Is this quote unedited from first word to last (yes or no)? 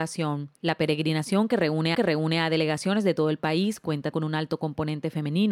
no